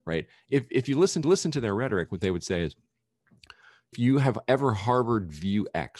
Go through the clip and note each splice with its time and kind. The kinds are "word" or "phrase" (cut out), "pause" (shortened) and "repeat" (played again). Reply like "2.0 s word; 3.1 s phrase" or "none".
1.2 s repeat; 3.9 s phrase